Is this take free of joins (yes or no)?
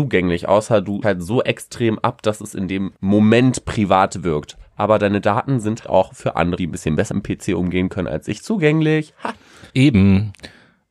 no